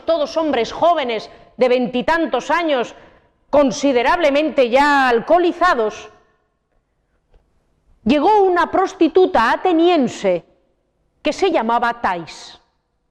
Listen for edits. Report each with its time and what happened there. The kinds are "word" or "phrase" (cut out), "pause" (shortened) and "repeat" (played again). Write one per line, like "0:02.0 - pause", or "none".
none

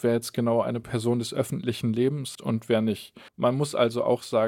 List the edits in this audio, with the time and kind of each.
0:02.3 - word
0:03.3 - pause

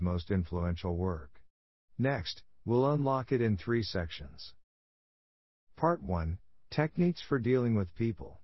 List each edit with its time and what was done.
none

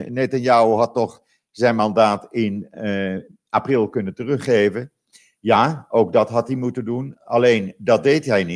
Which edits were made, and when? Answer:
none

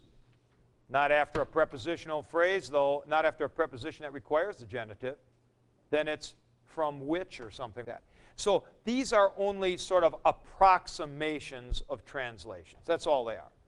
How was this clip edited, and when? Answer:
0:07.8 - word

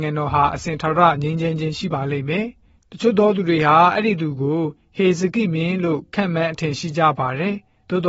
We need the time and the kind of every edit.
none

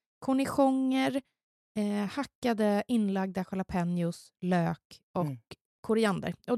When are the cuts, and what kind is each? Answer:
none

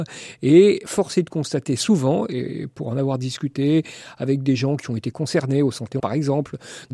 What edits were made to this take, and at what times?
0:06.0 - word

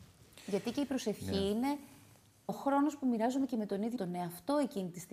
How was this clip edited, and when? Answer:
0:02.5 - word
0:04.0 - word

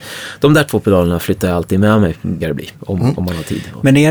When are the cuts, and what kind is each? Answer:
0:02.4 - word

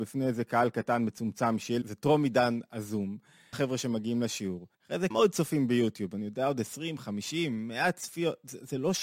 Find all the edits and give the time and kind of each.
0:01.8 - phrase
0:03.5 - phrase
0:04.7 - pause
0:05.1 - word

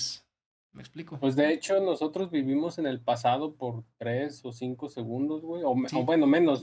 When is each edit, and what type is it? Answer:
none

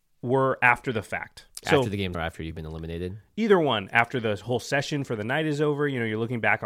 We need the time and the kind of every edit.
0:02.1 - word

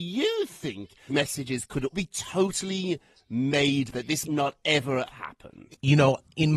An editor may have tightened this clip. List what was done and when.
0:01.1 - word
0:01.9 - word
0:03.9 - word
0:04.2 - word
0:05.1 - word

